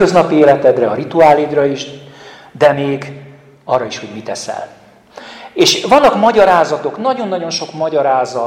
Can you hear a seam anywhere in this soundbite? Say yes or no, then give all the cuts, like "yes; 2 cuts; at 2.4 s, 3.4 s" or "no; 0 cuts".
no; 0 cuts